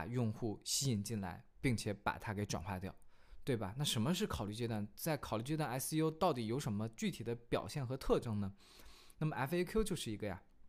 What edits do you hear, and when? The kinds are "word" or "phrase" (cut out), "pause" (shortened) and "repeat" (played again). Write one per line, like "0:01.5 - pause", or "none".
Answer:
none